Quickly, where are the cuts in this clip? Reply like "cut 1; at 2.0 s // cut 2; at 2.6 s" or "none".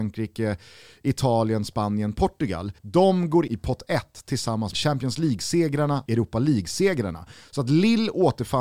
cut 1; at 2.8 s // cut 2; at 3.5 s // cut 3; at 4.7 s // cut 4; at 6.1 s